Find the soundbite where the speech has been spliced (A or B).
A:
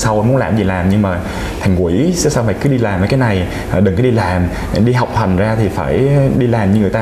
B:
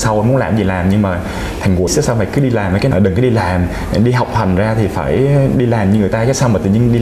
B